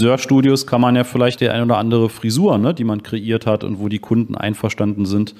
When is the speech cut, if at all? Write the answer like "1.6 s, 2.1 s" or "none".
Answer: 1.4 s